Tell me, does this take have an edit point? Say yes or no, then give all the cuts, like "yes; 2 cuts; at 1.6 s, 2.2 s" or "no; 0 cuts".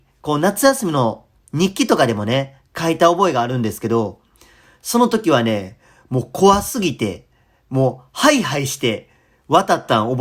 no; 0 cuts